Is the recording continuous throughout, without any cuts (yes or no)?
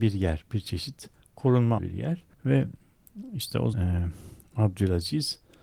no